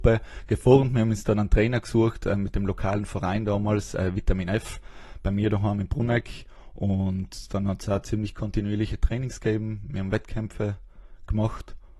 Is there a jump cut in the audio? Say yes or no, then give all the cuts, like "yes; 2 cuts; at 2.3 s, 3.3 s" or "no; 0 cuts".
no; 0 cuts